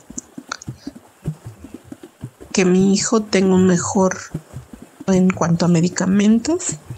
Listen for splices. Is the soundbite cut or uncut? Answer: cut